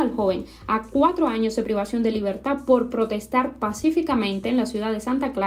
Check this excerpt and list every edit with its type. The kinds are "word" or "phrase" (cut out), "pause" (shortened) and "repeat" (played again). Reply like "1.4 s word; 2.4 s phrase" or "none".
none

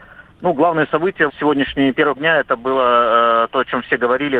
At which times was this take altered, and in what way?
1.3 s word; 2.2 s word

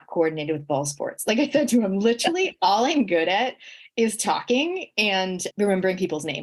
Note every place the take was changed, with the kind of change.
5.5 s word

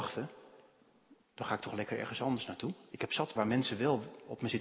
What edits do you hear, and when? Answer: 3.4 s word

